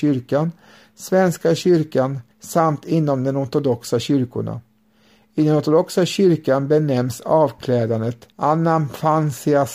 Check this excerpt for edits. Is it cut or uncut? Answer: cut